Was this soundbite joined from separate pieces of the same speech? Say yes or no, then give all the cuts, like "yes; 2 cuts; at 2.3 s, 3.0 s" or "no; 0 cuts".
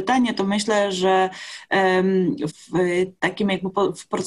yes; 1 cut; at 2.5 s